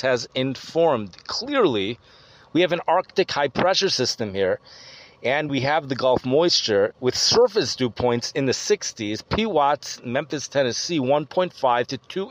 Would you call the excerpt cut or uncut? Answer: uncut